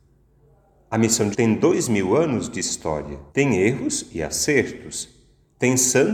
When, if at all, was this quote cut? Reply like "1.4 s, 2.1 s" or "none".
1.3 s, 3.3 s